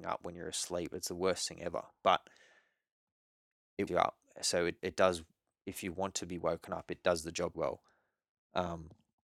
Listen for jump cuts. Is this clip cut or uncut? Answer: cut